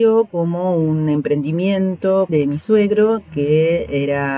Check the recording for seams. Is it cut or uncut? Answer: cut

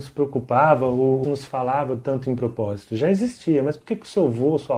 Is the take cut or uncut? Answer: cut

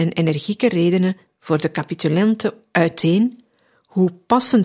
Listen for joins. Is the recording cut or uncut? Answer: uncut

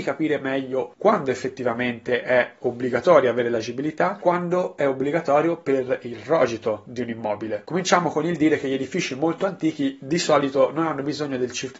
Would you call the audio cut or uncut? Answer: cut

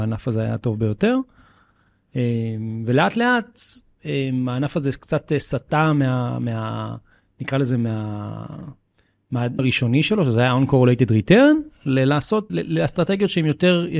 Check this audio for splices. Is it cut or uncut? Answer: cut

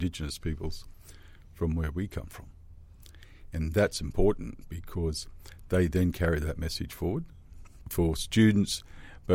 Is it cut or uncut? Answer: uncut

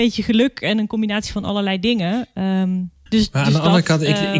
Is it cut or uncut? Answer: cut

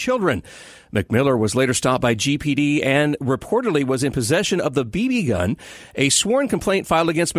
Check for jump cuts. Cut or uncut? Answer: uncut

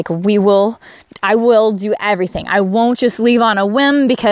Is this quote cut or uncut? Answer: uncut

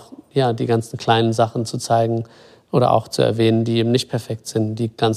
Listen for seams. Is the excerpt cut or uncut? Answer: uncut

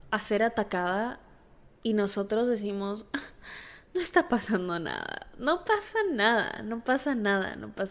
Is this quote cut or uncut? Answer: uncut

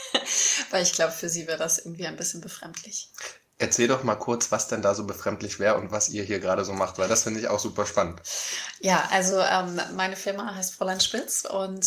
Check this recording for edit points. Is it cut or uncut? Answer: uncut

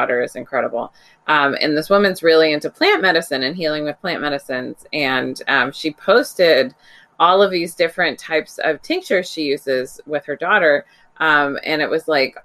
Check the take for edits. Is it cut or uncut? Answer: uncut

